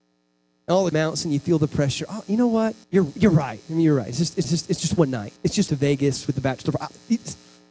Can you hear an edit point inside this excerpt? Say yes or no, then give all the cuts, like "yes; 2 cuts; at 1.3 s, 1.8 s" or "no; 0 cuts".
yes; 5 cuts; at 0.9 s, 2.8 s, 4.4 s, 5.4 s, 5.7 s